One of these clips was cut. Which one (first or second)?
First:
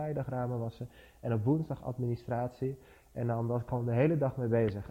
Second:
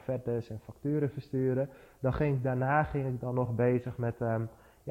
first